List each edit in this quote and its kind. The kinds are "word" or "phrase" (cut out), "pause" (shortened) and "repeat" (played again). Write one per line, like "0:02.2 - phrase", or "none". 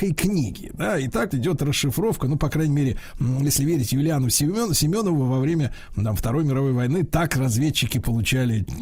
0:01.3 - word